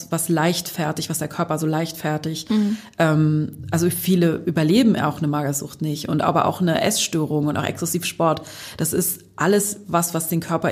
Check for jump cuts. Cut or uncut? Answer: uncut